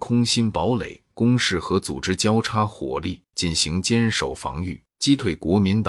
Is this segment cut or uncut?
cut